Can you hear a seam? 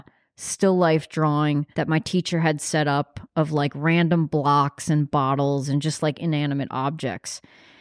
yes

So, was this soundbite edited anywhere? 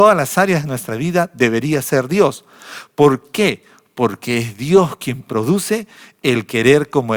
no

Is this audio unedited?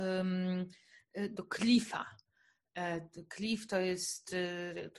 yes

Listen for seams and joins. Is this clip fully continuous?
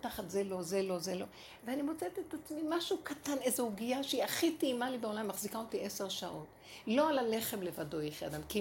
yes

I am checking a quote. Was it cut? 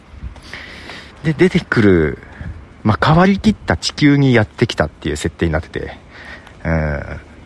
yes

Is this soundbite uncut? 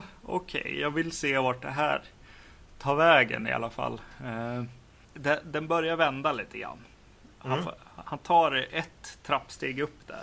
yes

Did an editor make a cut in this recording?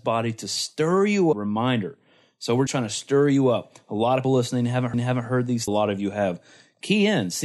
yes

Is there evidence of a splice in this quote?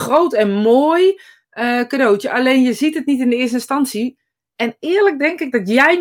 no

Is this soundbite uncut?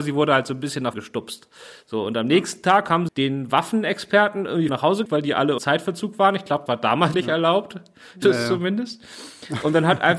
no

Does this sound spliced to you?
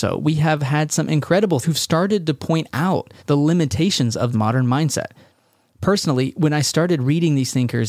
yes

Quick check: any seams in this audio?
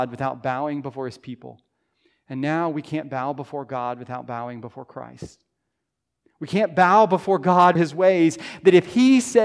yes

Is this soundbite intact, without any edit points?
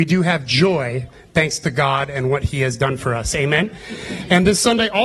yes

